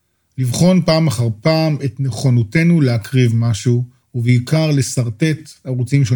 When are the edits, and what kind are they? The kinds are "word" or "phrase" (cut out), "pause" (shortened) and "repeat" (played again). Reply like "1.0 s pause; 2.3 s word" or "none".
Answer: 4.0 s pause